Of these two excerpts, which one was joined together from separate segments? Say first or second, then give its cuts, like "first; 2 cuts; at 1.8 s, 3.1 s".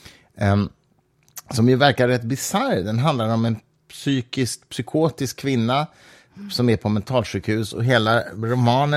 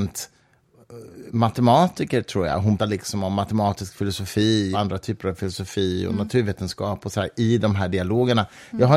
second; 2 cuts; at 2.8 s, 4.7 s